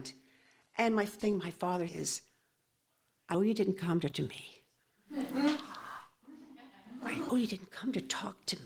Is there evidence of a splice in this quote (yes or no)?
yes